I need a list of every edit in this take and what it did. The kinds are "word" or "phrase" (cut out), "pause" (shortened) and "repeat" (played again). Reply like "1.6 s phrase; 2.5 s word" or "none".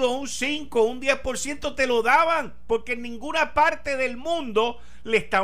none